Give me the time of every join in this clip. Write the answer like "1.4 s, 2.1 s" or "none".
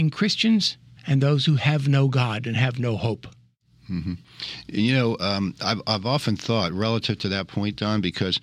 1.0 s